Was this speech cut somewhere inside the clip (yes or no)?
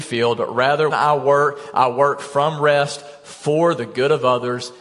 yes